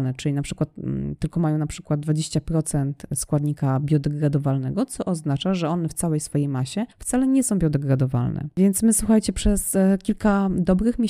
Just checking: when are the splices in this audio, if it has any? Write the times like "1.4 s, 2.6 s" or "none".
6.9 s